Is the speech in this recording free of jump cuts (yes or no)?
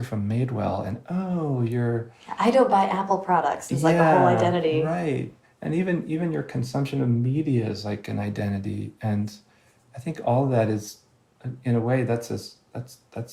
yes